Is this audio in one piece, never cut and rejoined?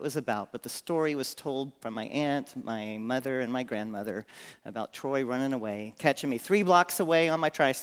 yes; 0 cuts

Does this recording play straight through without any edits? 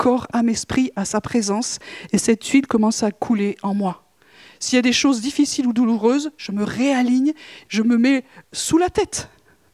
no; 1 cut; at 7.7 s

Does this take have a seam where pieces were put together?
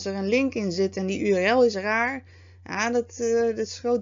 no; 0 cuts

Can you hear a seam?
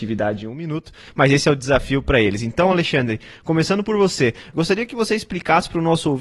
no; 0 cuts

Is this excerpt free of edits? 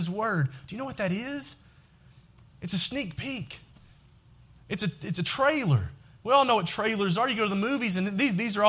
yes; 0 cuts

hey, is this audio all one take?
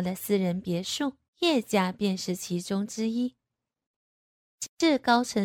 no; 1 cut; at 1.3 s

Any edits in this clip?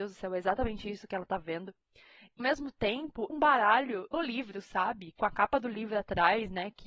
yes; 3 cuts; at 2.4 s, 3.3 s, 4.1 s

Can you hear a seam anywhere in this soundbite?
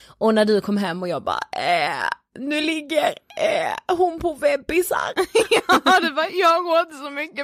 no; 0 cuts

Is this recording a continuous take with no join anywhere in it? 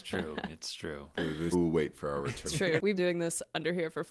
no; 4 cuts; at 1.5 s, 1.9 s, 2.5 s, 3.0 s

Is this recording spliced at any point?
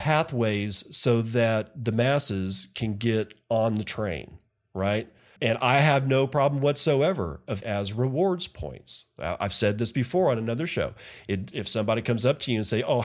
yes; 3 cuts; at 5.4 s, 7.6 s, 11.5 s

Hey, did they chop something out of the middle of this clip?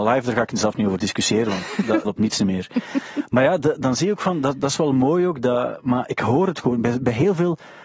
yes; 1 cut; at 2.0 s

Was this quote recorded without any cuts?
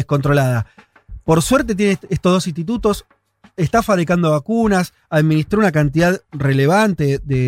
yes; 0 cuts

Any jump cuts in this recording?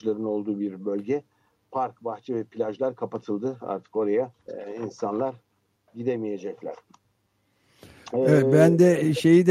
yes; 1 cut; at 4.4 s

